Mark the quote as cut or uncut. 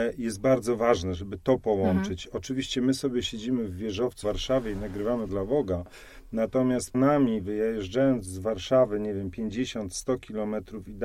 cut